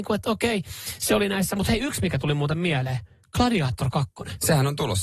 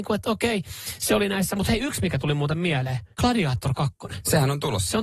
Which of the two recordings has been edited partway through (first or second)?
second